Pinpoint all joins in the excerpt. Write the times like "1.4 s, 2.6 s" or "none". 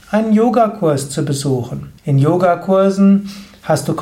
2.0 s